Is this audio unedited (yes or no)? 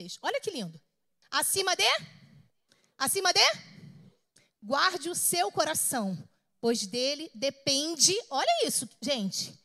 yes